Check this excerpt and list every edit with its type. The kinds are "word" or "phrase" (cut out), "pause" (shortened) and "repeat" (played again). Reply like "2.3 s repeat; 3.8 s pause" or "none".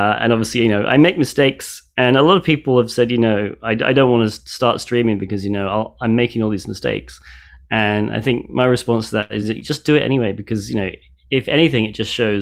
none

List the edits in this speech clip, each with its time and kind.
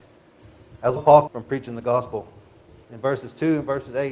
1.0 s phrase; 1.3 s phrase; 2.8 s pause

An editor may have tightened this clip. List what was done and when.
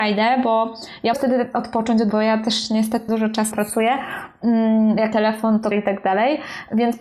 1.1 s word; 2.1 s word; 3.1 s word; 3.5 s word; 5.1 s word; 5.7 s word

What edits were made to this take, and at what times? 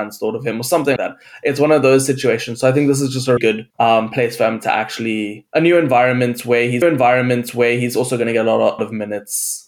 1.0 s word; 3.4 s word; 3.7 s pause; 6.8 s repeat; 8.8 s phrase

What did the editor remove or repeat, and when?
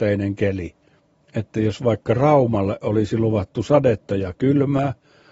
1.0 s pause

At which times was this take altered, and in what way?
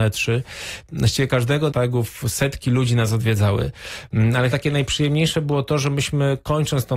1.7 s phrase; 4.5 s word

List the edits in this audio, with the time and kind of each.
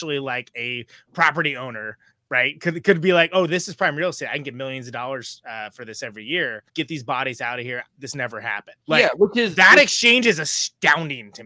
2.1 s pause; 6.7 s pause; 8.8 s pause

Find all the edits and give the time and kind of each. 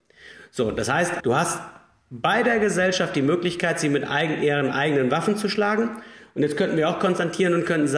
1.2 s word

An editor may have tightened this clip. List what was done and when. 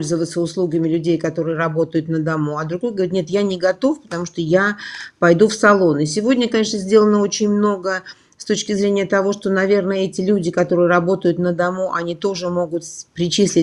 none

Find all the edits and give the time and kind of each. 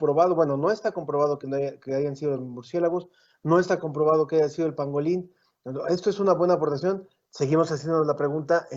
none

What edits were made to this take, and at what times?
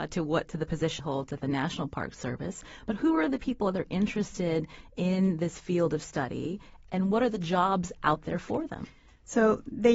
1.0 s word

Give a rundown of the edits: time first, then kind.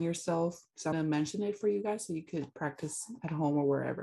0.9 s word

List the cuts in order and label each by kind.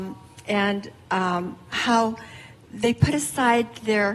none

